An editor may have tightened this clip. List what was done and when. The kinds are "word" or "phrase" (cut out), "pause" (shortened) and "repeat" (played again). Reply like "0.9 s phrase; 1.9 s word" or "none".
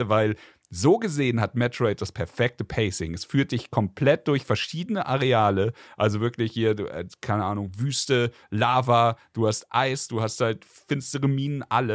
none